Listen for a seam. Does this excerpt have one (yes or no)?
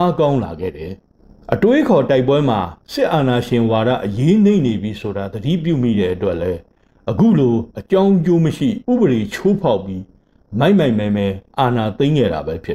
yes